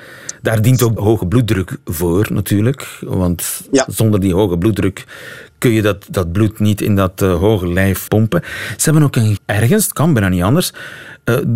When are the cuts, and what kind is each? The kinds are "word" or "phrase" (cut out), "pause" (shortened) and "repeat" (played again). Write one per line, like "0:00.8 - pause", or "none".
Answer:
0:01.0 - word
0:08.1 - word
0:09.4 - word